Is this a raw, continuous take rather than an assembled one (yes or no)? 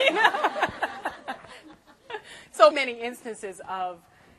no